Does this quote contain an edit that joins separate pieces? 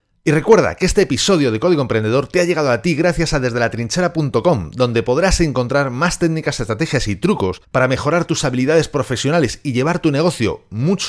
yes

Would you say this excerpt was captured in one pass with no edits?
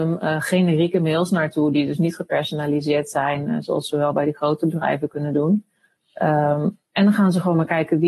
yes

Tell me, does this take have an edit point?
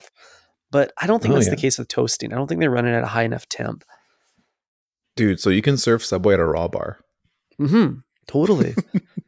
no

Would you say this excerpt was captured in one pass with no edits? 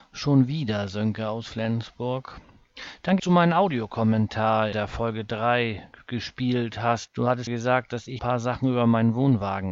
no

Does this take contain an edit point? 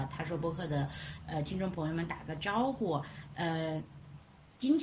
no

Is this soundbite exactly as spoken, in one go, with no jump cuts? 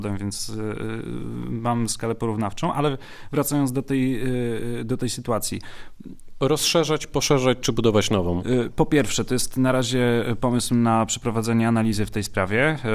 yes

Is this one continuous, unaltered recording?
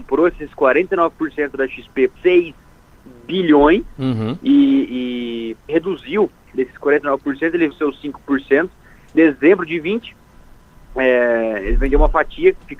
no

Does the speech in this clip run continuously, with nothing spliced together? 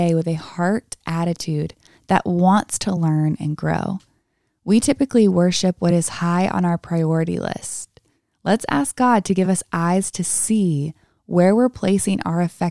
yes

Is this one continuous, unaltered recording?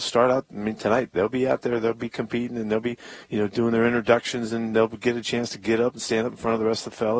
no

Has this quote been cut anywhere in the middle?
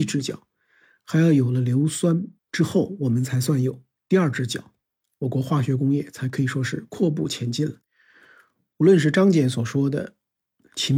yes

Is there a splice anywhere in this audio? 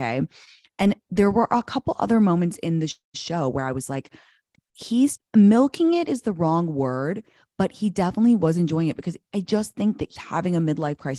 yes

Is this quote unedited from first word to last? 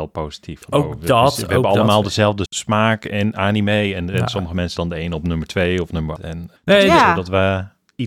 no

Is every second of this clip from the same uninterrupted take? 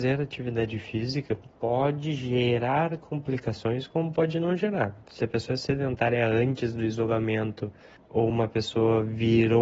yes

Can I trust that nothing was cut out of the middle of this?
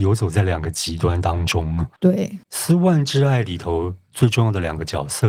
no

